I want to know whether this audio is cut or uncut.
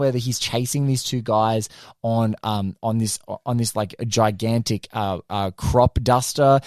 uncut